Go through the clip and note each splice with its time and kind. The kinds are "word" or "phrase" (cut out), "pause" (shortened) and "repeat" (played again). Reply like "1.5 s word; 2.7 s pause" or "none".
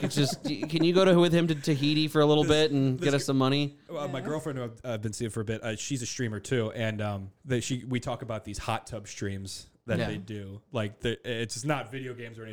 7.4 s pause